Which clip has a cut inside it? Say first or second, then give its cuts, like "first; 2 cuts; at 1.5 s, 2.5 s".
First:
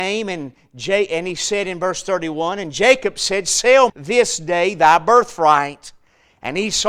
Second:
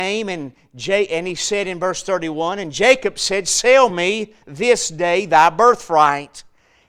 first; 1 cut; at 3.9 s